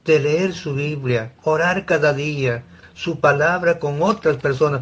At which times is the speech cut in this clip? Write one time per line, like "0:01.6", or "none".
0:01.4
0:02.8